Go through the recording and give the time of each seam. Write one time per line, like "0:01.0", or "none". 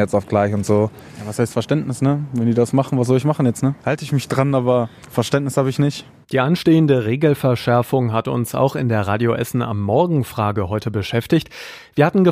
0:03.8